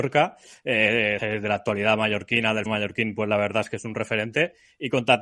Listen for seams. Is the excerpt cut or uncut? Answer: cut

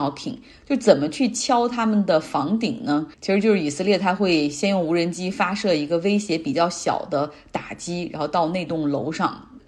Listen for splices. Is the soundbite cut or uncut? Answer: cut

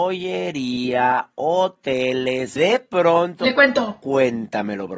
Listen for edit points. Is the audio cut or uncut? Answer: cut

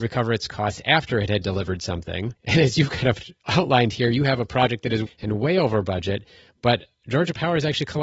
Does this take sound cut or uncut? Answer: cut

